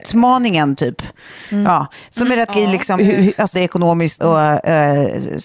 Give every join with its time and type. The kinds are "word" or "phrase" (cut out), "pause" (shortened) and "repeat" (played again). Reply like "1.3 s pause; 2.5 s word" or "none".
2.5 s word; 3.0 s word; 3.5 s word; 4.2 s word